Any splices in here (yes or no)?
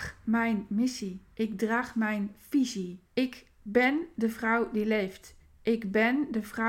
yes